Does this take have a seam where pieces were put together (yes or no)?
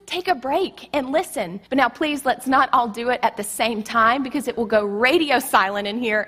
yes